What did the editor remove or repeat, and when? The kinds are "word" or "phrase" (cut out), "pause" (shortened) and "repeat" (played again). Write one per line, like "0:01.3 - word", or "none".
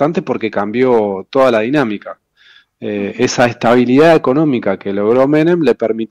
none